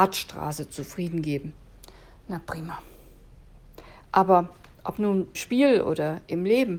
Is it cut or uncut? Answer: cut